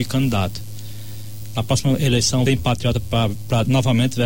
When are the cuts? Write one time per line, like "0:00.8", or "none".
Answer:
0:02.5